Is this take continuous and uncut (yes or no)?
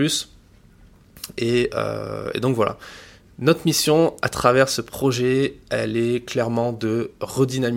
yes